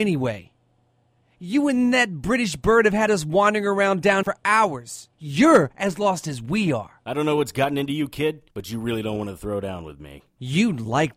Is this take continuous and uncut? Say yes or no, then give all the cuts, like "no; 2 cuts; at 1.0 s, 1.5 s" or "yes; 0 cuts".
no; 3 cuts; at 4.2 s, 5.1 s, 8.5 s